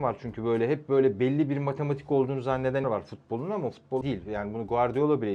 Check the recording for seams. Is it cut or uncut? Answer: cut